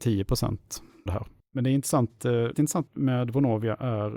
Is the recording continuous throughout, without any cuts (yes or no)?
no